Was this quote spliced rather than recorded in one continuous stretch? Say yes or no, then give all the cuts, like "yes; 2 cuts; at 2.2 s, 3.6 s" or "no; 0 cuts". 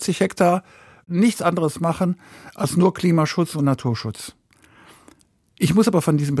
no; 0 cuts